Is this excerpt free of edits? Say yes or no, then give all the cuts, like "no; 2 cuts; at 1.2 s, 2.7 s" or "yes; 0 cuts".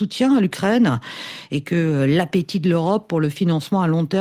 yes; 0 cuts